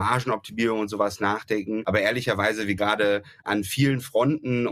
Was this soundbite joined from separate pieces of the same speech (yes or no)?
yes